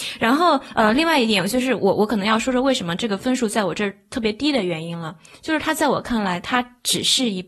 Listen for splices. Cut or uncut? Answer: uncut